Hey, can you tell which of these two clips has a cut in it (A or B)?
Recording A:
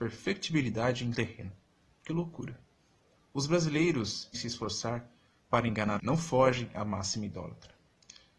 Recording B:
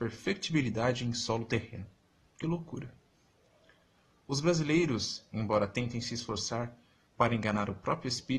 A